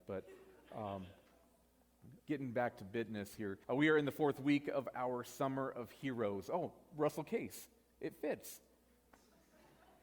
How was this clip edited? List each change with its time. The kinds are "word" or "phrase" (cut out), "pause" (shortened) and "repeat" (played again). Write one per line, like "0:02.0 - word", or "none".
0:02.2 - pause
0:03.6 - pause